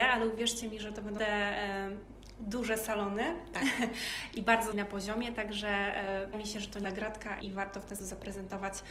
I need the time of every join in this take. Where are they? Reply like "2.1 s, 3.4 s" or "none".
1.2 s, 4.7 s, 6.3 s, 6.8 s, 7.4 s, 8.0 s